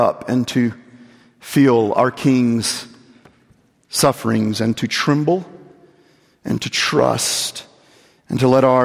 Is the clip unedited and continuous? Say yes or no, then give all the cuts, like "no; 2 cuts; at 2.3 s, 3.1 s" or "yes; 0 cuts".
yes; 0 cuts